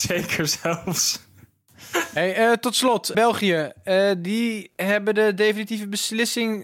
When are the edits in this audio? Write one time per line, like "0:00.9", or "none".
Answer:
0:03.1